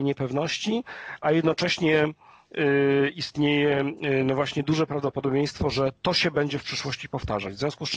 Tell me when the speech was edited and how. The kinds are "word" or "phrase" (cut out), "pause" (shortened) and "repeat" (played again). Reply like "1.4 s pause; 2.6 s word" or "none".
none